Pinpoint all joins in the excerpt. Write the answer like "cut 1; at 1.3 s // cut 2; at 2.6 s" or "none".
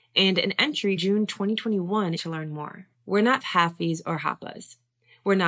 cut 1; at 1.0 s // cut 2; at 2.2 s // cut 3; at 2.9 s // cut 4; at 3.4 s